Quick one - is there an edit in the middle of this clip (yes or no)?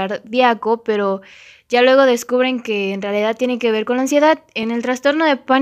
no